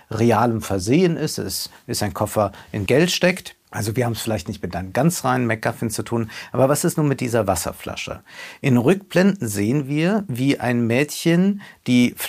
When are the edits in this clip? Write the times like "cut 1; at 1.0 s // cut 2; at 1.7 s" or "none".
cut 1; at 2.9 s // cut 2; at 3.6 s

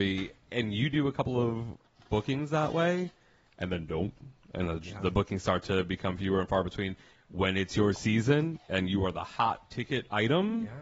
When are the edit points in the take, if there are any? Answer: none

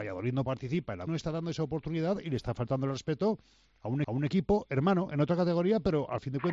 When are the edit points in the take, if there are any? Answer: cut 1; at 1.1 s // cut 2; at 4.0 s

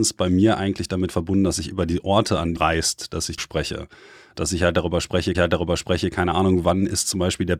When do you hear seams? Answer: cut 1; at 2.6 s // cut 2; at 3.4 s // cut 3; at 5.3 s

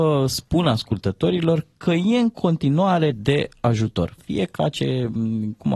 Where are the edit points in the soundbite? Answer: cut 1; at 3.1 s // cut 2; at 4.5 s

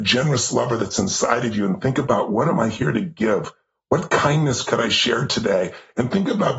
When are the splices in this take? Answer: none

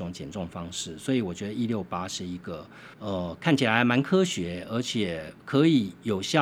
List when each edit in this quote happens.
cut 1; at 2.9 s // cut 2; at 5.4 s

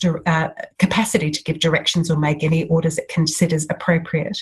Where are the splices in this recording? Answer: none

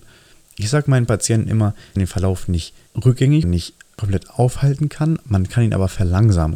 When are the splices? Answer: cut 1; at 2.0 s // cut 2; at 3.4 s

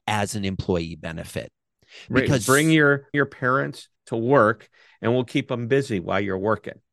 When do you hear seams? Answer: cut 1; at 3.1 s // cut 2; at 3.9 s

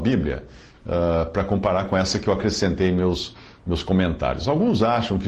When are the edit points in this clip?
none

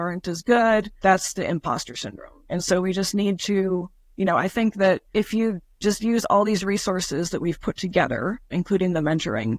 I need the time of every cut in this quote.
none

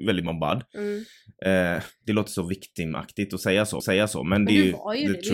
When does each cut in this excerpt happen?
cut 1; at 3.8 s

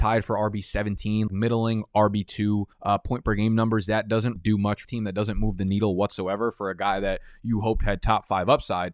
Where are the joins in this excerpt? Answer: cut 1; at 1.3 s // cut 2; at 2.7 s // cut 3; at 4.4 s // cut 4; at 4.8 s

